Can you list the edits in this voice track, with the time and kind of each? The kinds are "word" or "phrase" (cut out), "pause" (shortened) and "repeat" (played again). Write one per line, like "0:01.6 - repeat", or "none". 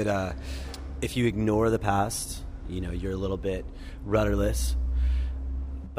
none